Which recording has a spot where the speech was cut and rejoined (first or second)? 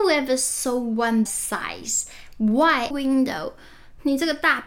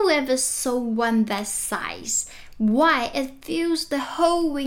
first